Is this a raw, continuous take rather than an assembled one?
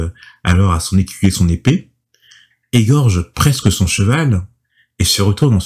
yes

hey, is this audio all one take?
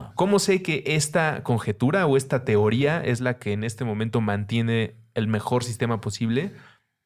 yes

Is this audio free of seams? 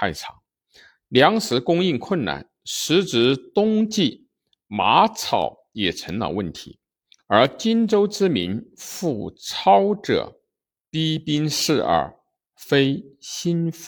yes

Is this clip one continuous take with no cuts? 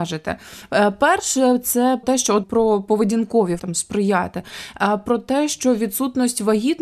no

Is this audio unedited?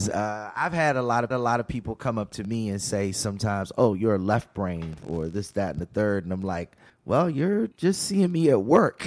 no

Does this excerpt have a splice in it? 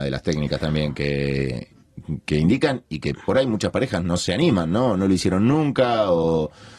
no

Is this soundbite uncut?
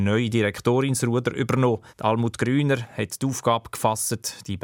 no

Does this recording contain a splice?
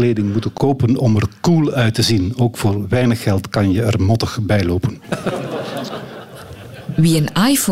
no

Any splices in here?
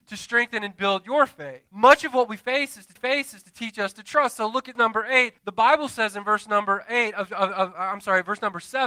yes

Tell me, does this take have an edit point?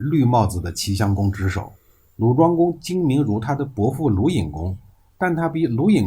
no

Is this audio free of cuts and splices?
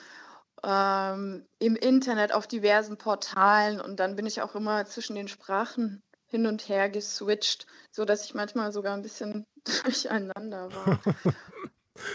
yes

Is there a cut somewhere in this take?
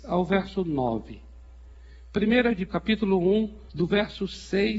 yes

